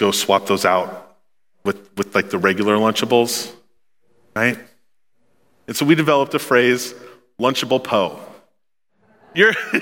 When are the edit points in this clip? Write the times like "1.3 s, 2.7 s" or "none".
none